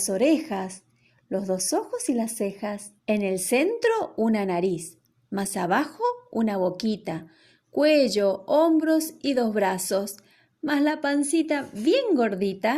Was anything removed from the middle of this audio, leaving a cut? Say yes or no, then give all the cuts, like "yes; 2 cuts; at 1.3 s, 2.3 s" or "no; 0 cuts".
yes; 1 cut; at 3.0 s